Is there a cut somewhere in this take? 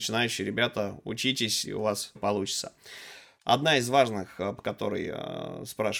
yes; 3 cuts; at 1.6 s, 2.2 s, 4.6 s

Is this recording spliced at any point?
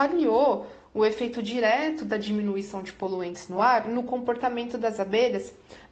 no; 0 cuts

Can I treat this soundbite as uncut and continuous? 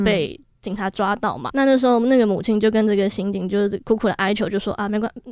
no; 1 cut; at 1.5 s

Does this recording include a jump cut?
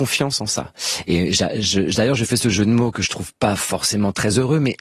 no; 0 cuts

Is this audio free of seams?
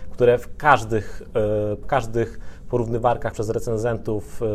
no; 2 cuts; at 1.8 s, 3.3 s

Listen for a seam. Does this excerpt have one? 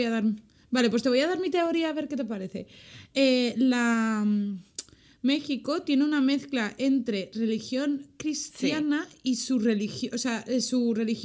no; 0 cuts

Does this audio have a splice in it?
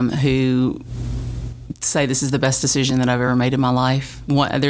no; 0 cuts

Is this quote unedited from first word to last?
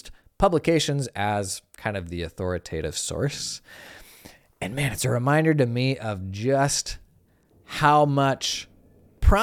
yes; 0 cuts

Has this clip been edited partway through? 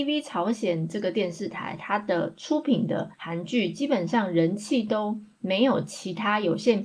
yes; 1 cut; at 3.1 s

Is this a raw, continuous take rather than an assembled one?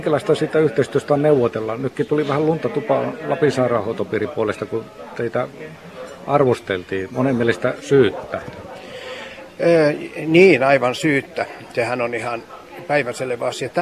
yes; 0 cuts

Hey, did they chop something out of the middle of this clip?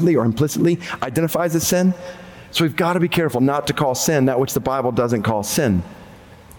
no; 0 cuts

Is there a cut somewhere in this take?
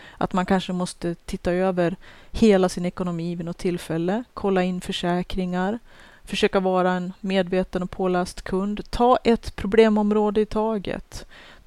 no; 0 cuts

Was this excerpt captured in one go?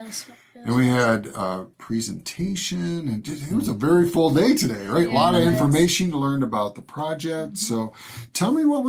no; 1 cut; at 1.7 s

